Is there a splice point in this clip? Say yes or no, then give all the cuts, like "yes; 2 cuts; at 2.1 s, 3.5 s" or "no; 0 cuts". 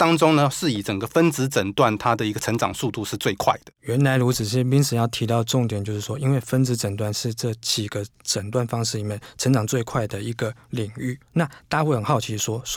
yes; 1 cut; at 11.2 s